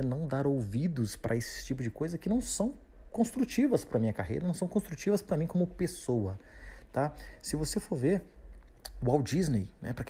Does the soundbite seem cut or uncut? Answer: uncut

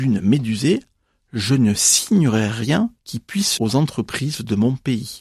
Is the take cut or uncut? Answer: cut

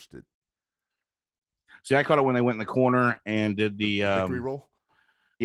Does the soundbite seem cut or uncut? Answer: uncut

